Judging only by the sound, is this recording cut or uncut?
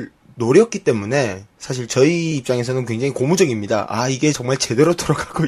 uncut